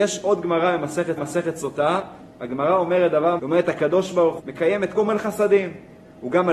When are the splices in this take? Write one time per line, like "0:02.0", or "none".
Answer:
0:01.2
0:03.4
0:04.4
0:04.9

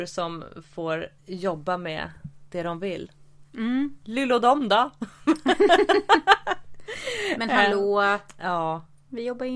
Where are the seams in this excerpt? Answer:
0:01.2

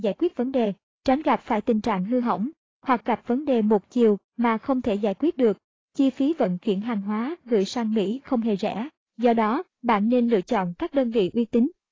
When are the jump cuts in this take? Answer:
none

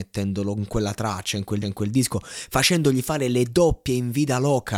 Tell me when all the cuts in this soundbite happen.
0:01.6

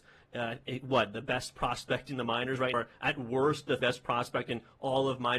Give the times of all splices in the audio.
0:02.7
0:03.8

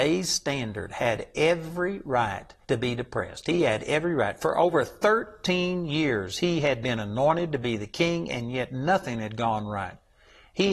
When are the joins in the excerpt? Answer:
0:02.6

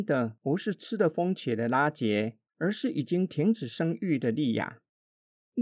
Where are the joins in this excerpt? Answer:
0:02.5

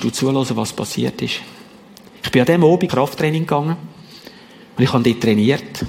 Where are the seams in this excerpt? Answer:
0:02.9

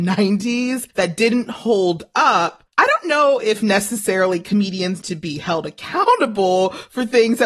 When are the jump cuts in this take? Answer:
0:00.9
0:02.7
0:05.0

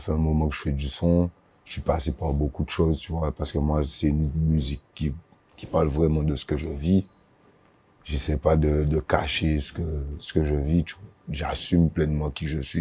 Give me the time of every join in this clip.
none

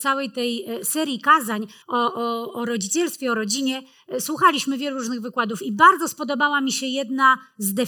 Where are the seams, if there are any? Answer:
0:01.8

